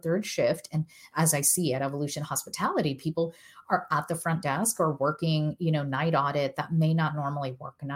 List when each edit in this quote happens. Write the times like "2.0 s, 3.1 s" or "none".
none

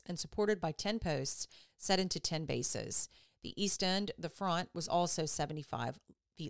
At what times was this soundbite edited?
none

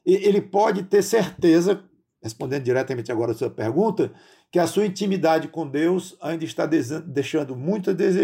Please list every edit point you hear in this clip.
none

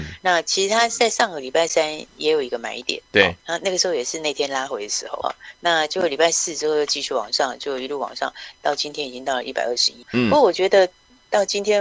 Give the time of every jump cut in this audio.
3.4 s, 5.2 s, 10.0 s

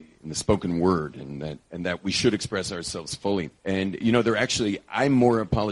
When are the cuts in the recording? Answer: 1.6 s, 3.6 s

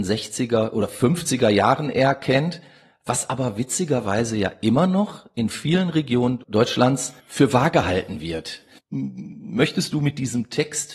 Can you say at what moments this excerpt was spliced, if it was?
7.2 s

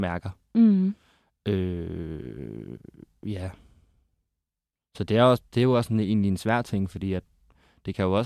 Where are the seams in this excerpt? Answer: none

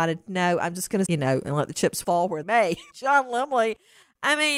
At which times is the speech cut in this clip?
1.1 s, 2.4 s, 2.9 s

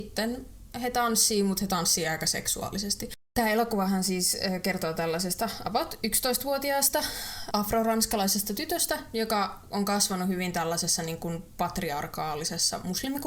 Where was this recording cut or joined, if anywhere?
3.2 s, 7.5 s

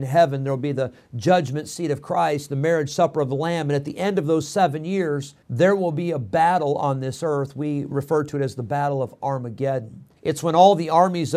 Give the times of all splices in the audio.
5.4 s, 10.2 s

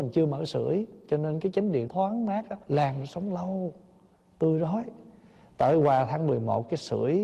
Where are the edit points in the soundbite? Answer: 1.9 s, 2.6 s

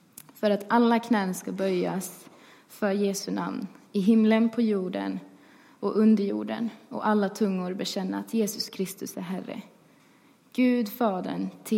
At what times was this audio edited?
none

